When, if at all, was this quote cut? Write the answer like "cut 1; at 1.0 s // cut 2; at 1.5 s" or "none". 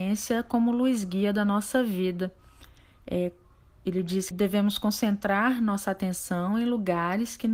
cut 1; at 4.3 s